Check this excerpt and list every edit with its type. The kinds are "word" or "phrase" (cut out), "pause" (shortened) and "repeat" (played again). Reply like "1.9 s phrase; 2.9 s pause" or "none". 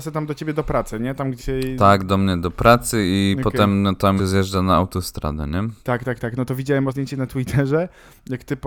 1.4 s word; 4.2 s word; 5.8 s pause; 6.9 s word